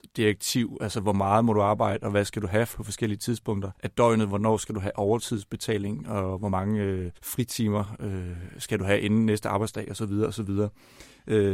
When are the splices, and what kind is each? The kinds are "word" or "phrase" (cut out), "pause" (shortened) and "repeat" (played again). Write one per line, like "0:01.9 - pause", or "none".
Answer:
0:02.7 - word
0:03.7 - pause
0:07.2 - pause